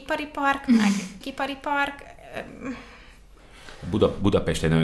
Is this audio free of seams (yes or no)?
no